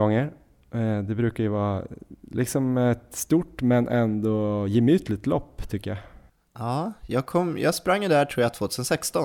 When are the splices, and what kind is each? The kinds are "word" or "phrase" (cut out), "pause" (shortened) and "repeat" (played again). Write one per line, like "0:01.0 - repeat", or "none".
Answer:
none